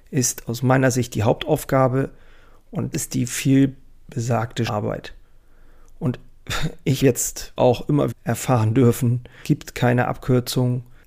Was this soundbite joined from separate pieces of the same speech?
yes; 6 cuts; at 2.9 s, 4.7 s, 7.0 s, 7.6 s, 8.1 s, 9.4 s

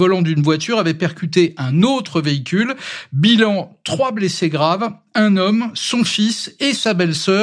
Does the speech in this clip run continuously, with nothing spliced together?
yes; 0 cuts

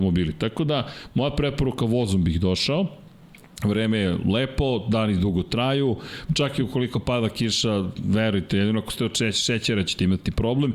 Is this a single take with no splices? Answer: yes; 0 cuts

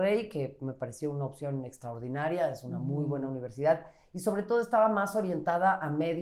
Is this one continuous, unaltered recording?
yes; 0 cuts

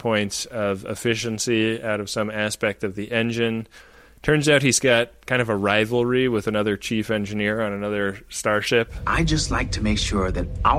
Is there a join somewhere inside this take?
no; 0 cuts

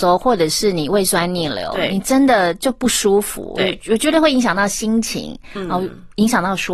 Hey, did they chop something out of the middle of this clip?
no; 0 cuts

